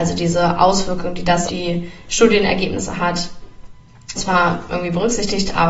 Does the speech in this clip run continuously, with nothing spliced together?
no; 2 cuts; at 1.5 s, 4.2 s

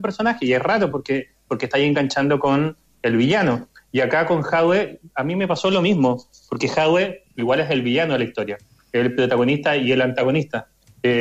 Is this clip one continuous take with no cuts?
yes; 0 cuts

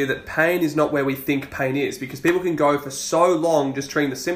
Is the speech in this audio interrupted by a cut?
no; 0 cuts

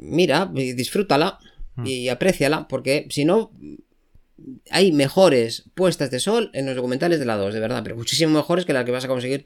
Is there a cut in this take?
no; 0 cuts

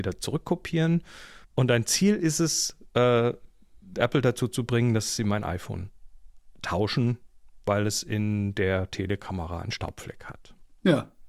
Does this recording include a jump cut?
yes; 1 cut; at 1.4 s

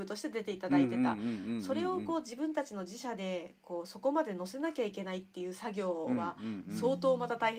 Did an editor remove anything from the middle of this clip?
no; 0 cuts

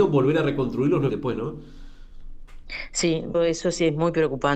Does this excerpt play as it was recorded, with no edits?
no; 2 cuts; at 1.1 s, 3.3 s

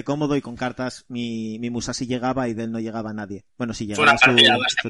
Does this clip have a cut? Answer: yes; 1 cut; at 3.5 s

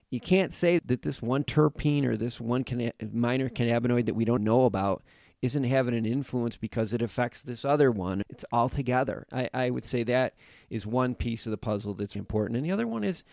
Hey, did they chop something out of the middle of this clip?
yes; 2 cuts; at 4.4 s, 12.2 s

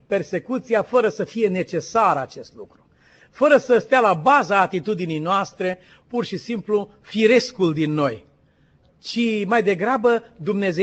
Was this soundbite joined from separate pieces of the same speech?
no; 0 cuts

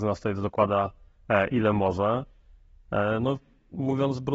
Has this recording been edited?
no; 0 cuts

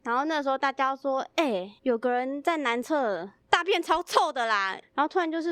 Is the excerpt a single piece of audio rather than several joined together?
no; 2 cuts; at 1.8 s, 3.4 s

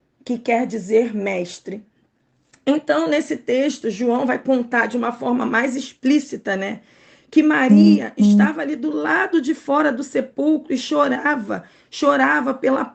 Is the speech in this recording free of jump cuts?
yes; 0 cuts

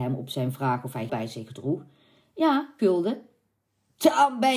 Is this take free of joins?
no; 2 cuts; at 1.1 s, 2.8 s

